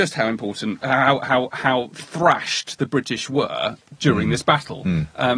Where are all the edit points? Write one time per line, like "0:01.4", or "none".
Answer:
none